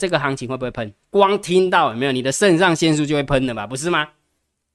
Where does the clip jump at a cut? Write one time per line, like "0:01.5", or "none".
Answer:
0:01.0